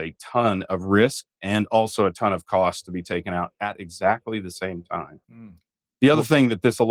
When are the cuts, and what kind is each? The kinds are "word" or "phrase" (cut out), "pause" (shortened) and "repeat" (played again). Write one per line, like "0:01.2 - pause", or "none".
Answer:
0:05.2 - pause